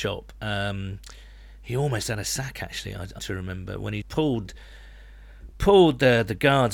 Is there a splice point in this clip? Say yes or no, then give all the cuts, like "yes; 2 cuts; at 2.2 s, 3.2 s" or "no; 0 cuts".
yes; 2 cuts; at 3.2 s, 4.0 s